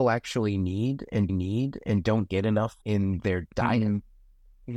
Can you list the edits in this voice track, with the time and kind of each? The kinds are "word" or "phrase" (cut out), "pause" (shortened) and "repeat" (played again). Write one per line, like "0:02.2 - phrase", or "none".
0:01.3 - repeat
0:02.8 - pause

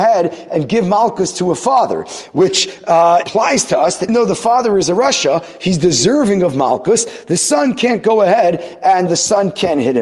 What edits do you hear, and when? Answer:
0:03.2 - word
0:04.1 - word
0:09.1 - word

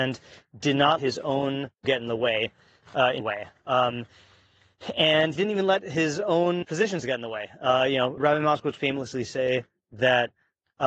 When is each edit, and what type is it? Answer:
0:01.0 - word
0:01.8 - word
0:03.2 - word
0:05.4 - word
0:06.6 - word
0:08.2 - word
0:08.8 - word

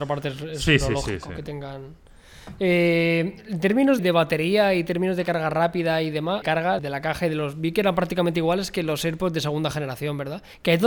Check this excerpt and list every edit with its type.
0:04.0 - word
0:06.4 - phrase
0:06.8 - word

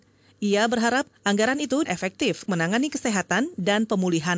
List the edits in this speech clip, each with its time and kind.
0:01.2 - pause
0:01.8 - word
0:02.5 - word

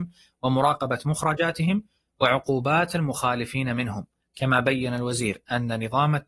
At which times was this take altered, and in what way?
none

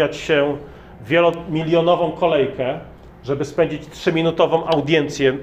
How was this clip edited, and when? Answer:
none

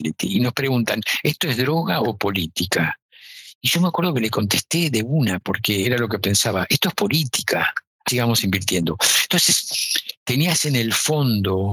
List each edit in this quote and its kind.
0:08.1 - word

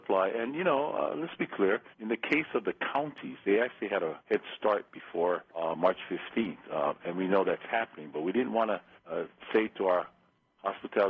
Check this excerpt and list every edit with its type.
0:01.9 - pause
0:04.2 - pause
0:05.5 - pause
0:09.0 - pause

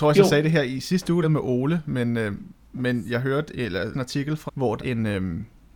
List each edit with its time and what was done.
0:01.2 - phrase
0:03.9 - word
0:04.5 - word
0:04.8 - word

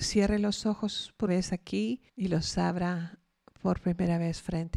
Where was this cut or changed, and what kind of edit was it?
0:01.3 - word
0:02.1 - pause
0:03.4 - pause

